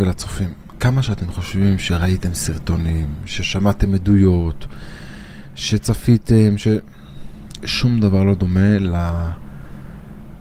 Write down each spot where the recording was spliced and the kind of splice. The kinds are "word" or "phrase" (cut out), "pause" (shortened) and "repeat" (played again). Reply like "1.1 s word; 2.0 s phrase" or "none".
none